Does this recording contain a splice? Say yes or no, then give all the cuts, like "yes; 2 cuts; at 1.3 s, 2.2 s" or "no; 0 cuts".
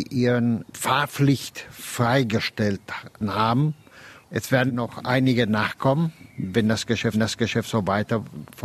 yes; 2 cuts; at 4.7 s, 7.1 s